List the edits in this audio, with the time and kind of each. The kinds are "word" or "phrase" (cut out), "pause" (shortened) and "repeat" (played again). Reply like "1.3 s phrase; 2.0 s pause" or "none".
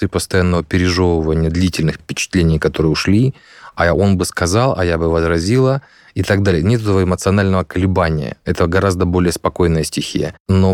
2.0 s word